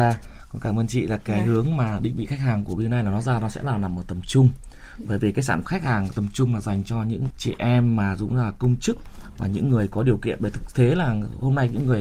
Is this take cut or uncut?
cut